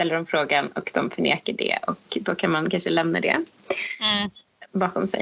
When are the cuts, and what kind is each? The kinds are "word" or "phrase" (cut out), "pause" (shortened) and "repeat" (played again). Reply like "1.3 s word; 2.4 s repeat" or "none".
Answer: none